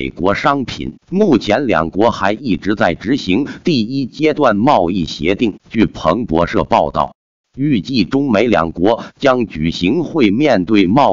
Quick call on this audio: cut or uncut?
cut